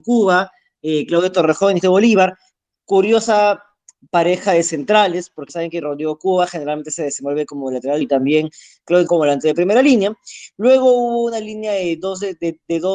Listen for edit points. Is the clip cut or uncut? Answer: cut